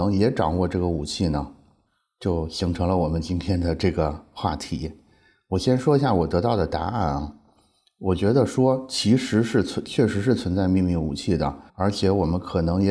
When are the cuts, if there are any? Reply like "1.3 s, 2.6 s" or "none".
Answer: 11.7 s